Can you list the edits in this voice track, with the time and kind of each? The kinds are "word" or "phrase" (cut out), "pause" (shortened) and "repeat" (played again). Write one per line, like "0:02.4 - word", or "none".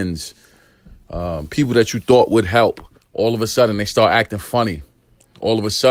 0:03.0 - pause